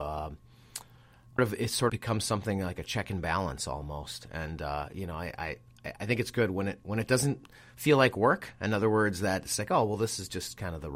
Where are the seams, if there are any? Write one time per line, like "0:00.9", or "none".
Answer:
0:01.4
0:01.9